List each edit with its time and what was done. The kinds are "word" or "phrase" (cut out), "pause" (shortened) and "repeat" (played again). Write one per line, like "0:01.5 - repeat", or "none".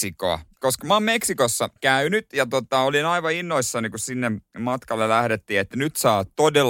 0:01.8 - pause